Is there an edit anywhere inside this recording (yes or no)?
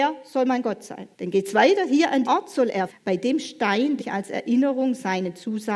yes